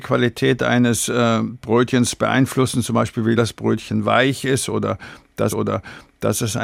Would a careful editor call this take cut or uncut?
cut